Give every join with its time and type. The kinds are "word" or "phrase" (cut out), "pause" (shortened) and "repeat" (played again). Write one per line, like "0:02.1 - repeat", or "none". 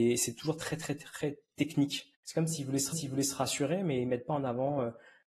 0:02.1 - pause
0:02.9 - repeat